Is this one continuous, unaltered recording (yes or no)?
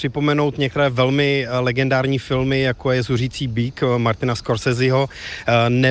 yes